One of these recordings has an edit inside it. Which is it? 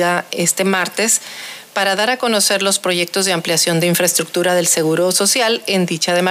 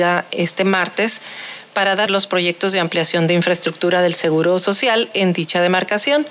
second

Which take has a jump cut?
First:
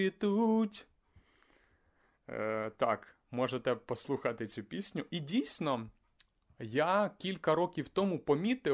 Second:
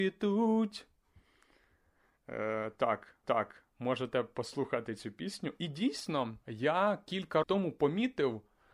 second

